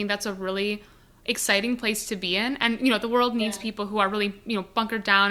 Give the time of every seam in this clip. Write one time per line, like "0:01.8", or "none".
none

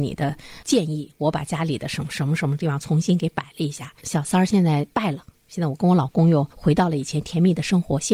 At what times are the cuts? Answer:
0:04.0
0:06.5

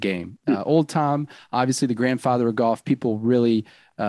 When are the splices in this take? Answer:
none

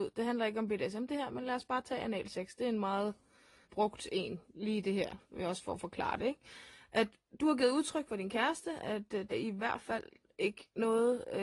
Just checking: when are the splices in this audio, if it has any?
0:03.6
0:09.3

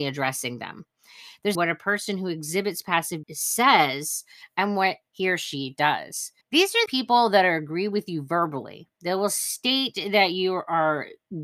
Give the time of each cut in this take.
0:01.5
0:03.2
0:06.4
0:06.9

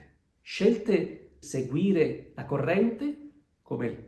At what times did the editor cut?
0:01.4

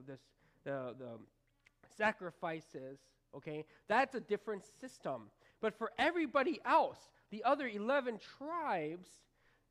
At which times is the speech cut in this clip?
none

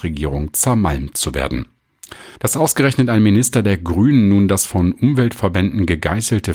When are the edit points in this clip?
0:02.4

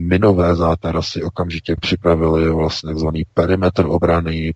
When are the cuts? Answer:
0:01.8

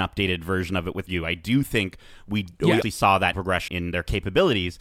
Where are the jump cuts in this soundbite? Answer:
0:01.1
0:02.8
0:03.3
0:03.7

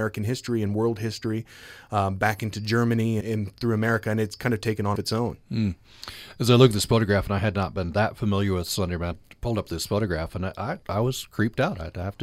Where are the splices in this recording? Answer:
0:03.2
0:05.0
0:09.1
0:10.8

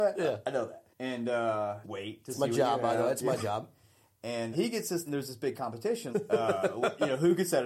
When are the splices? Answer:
0:00.9
0:01.8
0:04.5
0:05.1
0:06.1

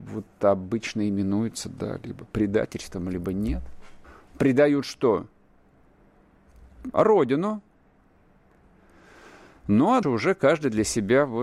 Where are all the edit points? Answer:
0:04.0
0:10.0

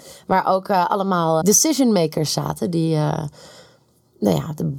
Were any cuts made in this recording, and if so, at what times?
0:01.4

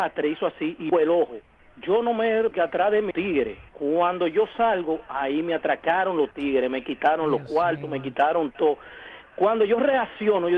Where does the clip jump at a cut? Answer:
0:00.9
0:01.6
0:02.5
0:03.1
0:03.7

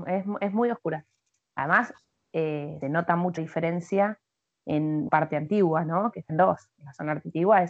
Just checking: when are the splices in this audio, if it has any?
0:02.8
0:03.4
0:05.1
0:06.3

